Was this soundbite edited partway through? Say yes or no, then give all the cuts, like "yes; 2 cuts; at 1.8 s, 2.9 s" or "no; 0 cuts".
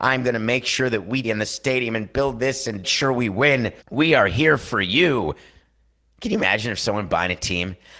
yes; 3 cuts; at 1.2 s, 2.8 s, 3.8 s